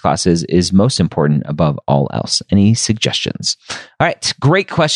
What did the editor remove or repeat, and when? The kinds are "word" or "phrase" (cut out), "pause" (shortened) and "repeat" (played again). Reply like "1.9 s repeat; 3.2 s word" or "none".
none

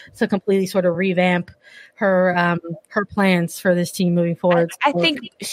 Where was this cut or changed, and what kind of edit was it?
none

